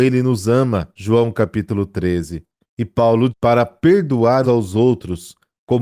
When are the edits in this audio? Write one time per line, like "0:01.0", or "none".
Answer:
0:00.9
0:02.6
0:03.3
0:04.4

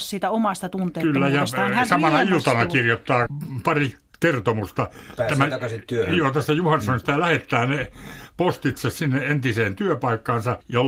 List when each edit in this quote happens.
none

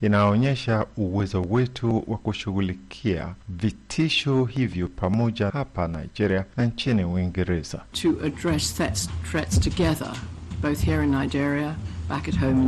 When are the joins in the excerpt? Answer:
0:05.5

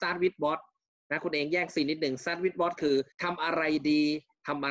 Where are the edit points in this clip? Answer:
0:03.1

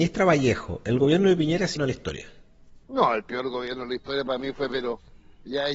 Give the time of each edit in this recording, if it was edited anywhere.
0:01.8
0:02.8
0:04.7

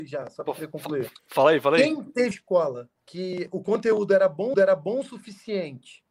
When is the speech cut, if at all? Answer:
0:01.2
0:02.3
0:03.0
0:04.5

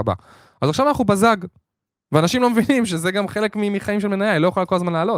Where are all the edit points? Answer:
none

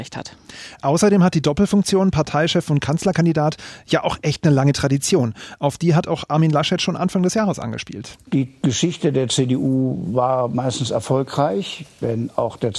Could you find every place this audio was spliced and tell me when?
none

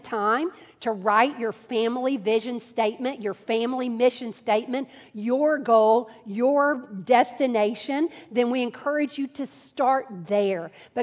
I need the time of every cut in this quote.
none

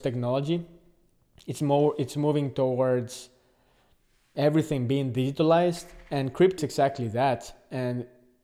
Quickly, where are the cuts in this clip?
0:06.6

